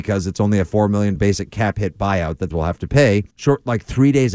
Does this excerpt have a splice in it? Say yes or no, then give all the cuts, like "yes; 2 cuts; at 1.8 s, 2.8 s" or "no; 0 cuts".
yes; 3 cuts; at 1.2 s, 2.5 s, 3.3 s